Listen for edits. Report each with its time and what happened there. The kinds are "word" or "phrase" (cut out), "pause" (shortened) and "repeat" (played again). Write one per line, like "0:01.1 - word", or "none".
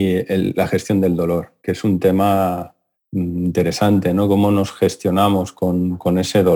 0:01.6 - pause
0:02.9 - pause